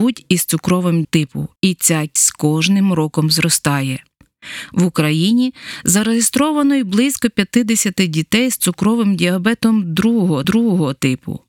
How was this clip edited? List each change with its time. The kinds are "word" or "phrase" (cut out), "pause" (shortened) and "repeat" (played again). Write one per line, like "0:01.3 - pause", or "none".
0:01.0 - phrase
0:01.6 - pause
0:02.2 - word
0:10.4 - repeat